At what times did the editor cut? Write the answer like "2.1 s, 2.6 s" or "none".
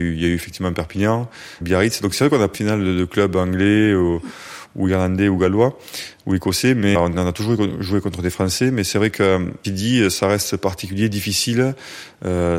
1.6 s, 2.5 s, 6.9 s, 9.6 s